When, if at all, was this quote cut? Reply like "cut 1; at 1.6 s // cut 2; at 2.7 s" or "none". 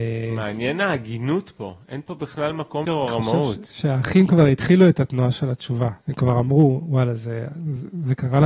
cut 1; at 2.8 s // cut 2; at 6.0 s